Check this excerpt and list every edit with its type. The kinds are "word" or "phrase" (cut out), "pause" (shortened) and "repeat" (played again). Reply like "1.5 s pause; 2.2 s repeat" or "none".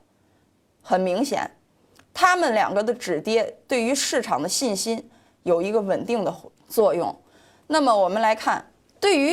none